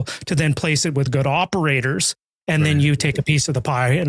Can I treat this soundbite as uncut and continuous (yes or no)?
yes